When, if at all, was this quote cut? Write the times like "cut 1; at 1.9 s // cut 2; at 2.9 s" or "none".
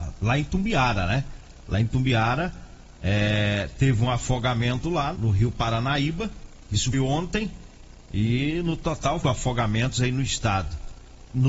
cut 1; at 5.1 s // cut 2; at 6.9 s // cut 3; at 8.0 s // cut 4; at 9.2 s